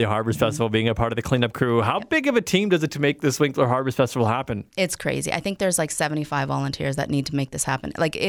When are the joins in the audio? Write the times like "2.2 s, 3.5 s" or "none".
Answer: 2.9 s